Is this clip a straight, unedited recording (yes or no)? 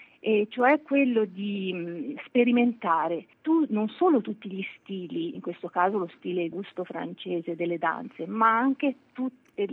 no